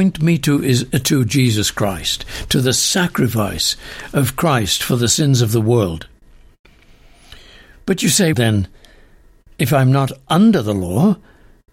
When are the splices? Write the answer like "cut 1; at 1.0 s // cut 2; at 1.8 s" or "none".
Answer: cut 1; at 8.3 s